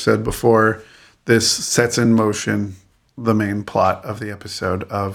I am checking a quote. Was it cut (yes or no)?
no